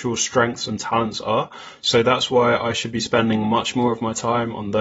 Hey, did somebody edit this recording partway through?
no; 0 cuts

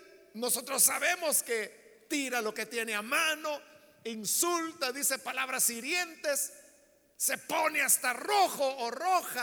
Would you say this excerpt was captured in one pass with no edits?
yes; 0 cuts

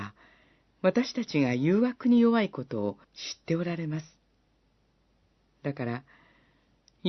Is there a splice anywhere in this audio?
yes; 1 cut; at 3.0 s

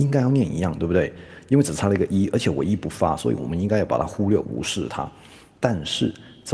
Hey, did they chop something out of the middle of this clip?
no; 0 cuts

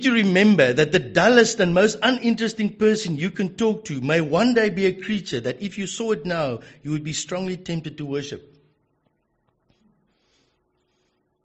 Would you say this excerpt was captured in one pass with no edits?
yes; 0 cuts

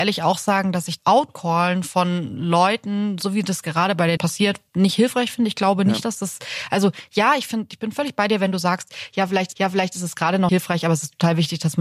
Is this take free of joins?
no; 5 cuts; at 1.0 s, 4.2 s, 4.7 s, 9.5 s, 10.5 s

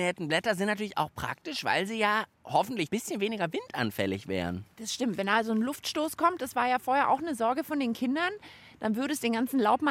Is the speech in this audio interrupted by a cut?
yes; 1 cut; at 2.9 s

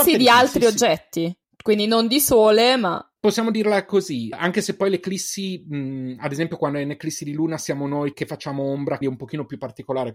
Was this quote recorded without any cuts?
no; 5 cuts; at 1.4 s, 3.2 s, 4.3 s, 8.1 s, 9.0 s

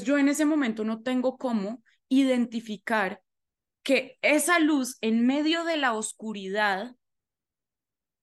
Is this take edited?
no; 0 cuts

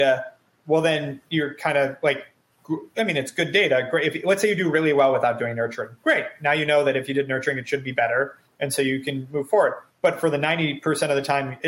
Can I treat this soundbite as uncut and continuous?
no; 1 cut; at 9.9 s

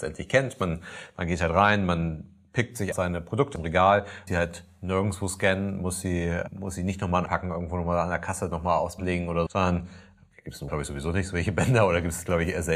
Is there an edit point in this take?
yes; 7 cuts; at 2.9 s, 3.5 s, 4.3 s, 7.3 s, 9.0 s, 9.5 s, 10.7 s

